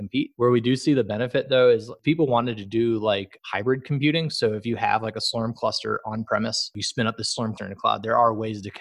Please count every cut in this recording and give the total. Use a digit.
1